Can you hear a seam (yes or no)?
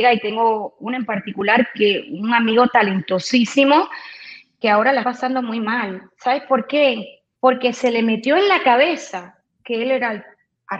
yes